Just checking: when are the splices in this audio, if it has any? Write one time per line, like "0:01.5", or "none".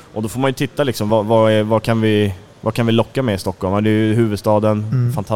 none